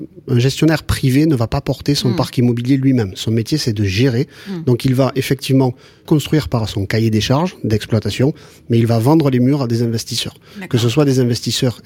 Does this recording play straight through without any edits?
no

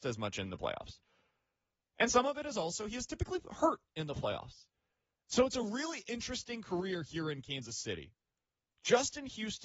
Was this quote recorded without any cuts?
yes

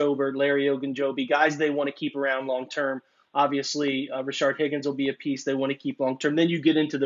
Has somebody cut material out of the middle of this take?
no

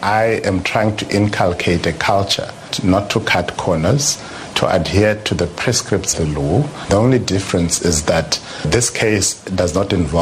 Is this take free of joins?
no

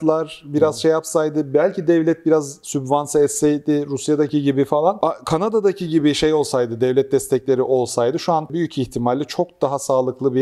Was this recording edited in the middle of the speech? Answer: no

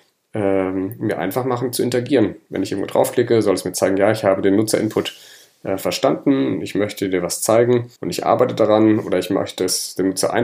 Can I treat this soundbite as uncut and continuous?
no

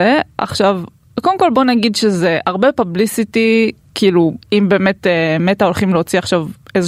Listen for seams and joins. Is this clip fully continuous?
no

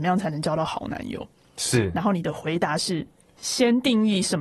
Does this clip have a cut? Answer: no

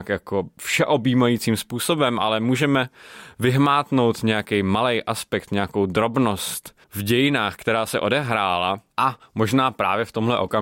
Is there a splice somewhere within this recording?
yes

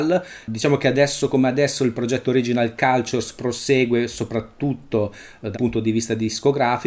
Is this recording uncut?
no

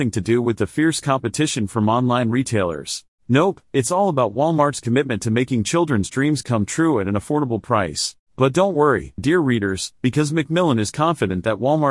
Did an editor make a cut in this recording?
yes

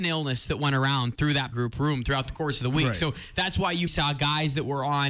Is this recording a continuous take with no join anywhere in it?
no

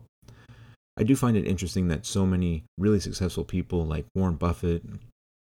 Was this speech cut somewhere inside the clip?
no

